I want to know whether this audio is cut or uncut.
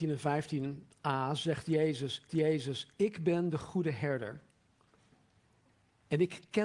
cut